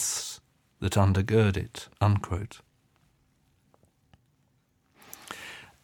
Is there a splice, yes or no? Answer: yes